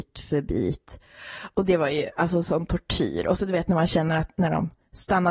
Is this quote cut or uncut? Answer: uncut